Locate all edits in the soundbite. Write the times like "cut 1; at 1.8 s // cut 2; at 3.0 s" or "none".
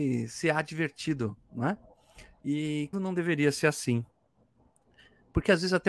cut 1; at 2.9 s